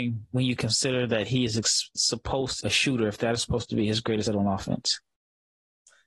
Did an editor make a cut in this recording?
yes; 2 cuts; at 2.6 s, 4.3 s

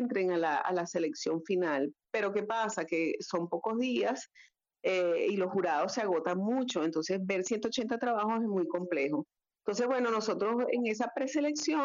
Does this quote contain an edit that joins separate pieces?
no; 0 cuts

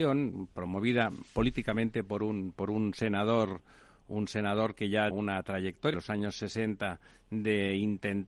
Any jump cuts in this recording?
yes; 2 cuts; at 5.1 s, 5.9 s

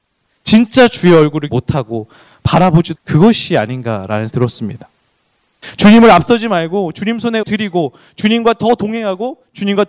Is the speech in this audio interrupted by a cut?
yes; 4 cuts; at 1.5 s, 2.9 s, 4.3 s, 7.4 s

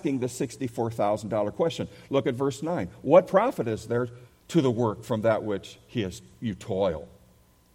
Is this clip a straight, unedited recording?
no; 1 cut; at 4.3 s

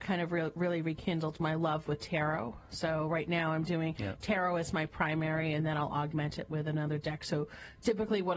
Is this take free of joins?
yes; 0 cuts

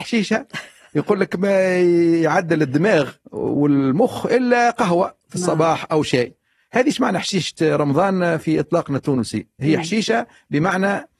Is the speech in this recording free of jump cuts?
no; 1 cut; at 3.2 s

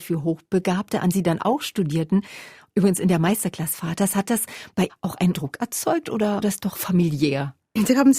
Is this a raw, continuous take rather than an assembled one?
no; 6 cuts; at 1.1 s, 3.7 s, 4.9 s, 5.3 s, 6.4 s, 6.7 s

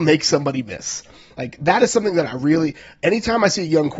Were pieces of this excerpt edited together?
no; 0 cuts

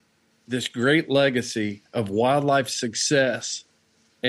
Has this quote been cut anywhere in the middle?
no; 0 cuts

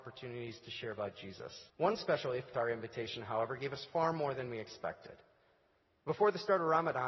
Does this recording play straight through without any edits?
no; 1 cut; at 1.7 s

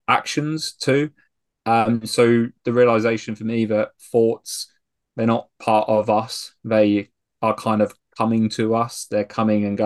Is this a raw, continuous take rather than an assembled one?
yes; 0 cuts

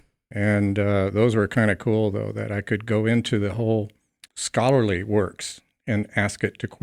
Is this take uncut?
no; 1 cut; at 4.3 s

